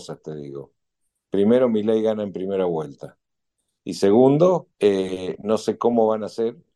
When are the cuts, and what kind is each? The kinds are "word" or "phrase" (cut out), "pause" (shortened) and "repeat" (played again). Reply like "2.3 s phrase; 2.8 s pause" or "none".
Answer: 4.7 s pause